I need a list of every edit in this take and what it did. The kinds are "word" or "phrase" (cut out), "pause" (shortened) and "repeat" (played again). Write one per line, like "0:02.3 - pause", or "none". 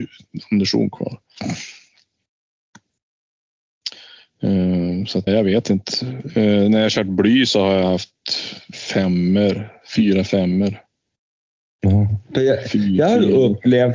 0:05.3 - word